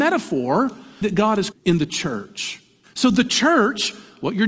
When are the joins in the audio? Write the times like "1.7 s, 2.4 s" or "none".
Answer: 1.0 s, 1.5 s, 2.8 s